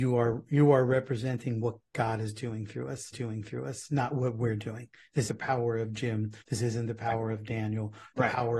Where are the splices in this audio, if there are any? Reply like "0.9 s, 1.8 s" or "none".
3.1 s, 5.3 s, 6.4 s